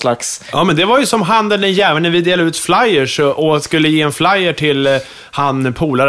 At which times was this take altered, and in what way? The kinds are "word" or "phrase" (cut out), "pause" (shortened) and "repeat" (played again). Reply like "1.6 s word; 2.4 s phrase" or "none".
none